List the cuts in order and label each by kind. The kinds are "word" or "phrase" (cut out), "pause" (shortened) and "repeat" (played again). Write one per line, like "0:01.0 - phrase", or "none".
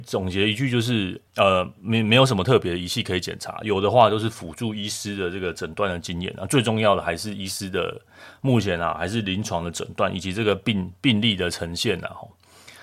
0:01.3 - pause